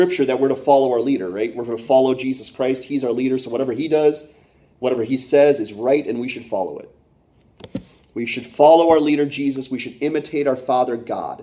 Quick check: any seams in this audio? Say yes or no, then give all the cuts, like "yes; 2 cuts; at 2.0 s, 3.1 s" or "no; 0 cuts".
no; 0 cuts